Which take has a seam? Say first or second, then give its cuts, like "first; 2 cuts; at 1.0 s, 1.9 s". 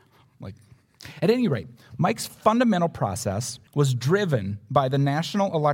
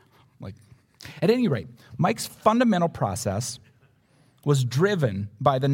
first; 1 cut; at 3.7 s